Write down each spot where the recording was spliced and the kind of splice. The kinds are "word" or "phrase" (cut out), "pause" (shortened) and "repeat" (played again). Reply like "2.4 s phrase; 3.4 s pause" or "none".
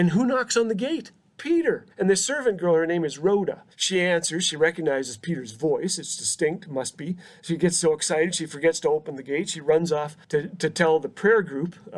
1.9 s pause; 3.7 s pause; 10.2 s pause